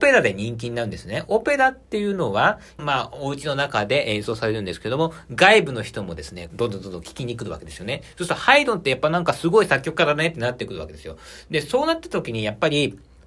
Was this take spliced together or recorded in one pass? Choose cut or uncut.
cut